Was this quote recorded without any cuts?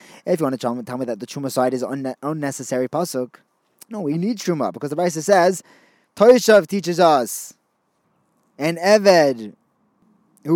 no; 1 cut; at 2.2 s

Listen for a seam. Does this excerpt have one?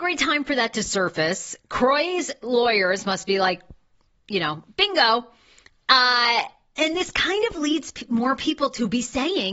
no; 0 cuts

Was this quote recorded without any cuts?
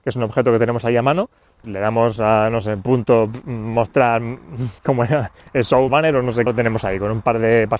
no; 4 cuts; at 1.6 s, 4.8 s, 5.9 s, 6.5 s

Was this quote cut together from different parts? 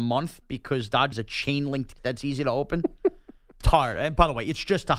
yes; 3 cuts; at 1.1 s, 2.0 s, 3.6 s

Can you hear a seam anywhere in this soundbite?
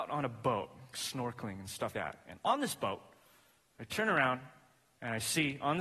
yes; 2 cuts; at 0.9 s, 1.9 s

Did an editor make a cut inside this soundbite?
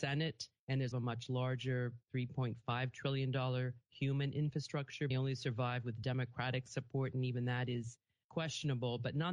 yes; 3 cuts; at 0.9 s, 2.0 s, 5.1 s

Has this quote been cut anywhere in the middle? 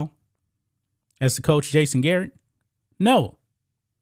no; 0 cuts

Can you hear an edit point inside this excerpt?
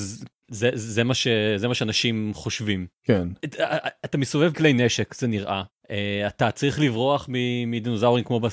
yes; 2 cuts; at 2.9 s, 4.5 s

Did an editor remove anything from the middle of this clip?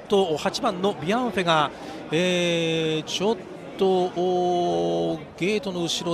no; 0 cuts

